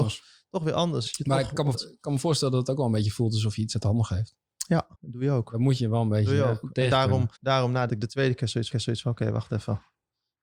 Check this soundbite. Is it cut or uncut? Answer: cut